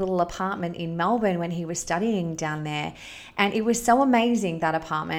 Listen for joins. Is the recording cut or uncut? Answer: uncut